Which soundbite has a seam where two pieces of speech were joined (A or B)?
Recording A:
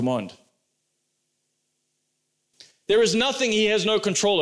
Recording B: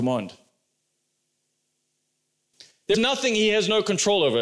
B